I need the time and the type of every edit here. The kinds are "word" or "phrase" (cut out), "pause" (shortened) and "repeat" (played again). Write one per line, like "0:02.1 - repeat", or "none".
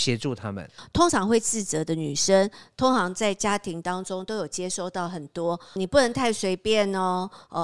0:05.8 - word